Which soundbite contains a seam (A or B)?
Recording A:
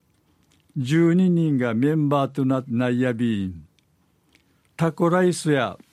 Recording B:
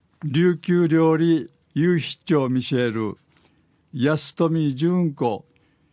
B